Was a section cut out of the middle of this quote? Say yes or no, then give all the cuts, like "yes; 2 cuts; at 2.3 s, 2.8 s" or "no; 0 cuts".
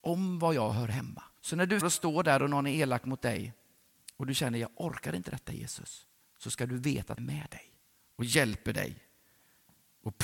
yes; 4 cuts; at 1.4 s, 1.8 s, 6.2 s, 7.2 s